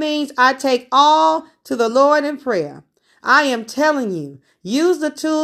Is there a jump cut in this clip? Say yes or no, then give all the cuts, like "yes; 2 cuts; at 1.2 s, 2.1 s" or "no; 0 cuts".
no; 0 cuts